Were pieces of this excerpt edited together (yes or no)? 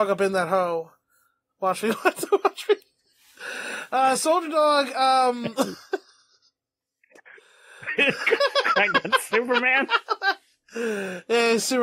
no